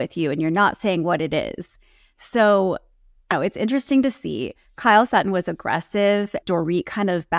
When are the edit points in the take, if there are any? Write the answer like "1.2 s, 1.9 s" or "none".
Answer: 3.3 s, 5.1 s, 6.4 s